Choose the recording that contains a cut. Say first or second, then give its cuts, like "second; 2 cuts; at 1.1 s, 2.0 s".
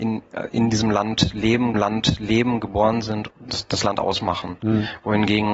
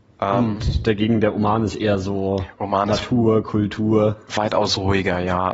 first; 2 cuts; at 1.7 s, 3.3 s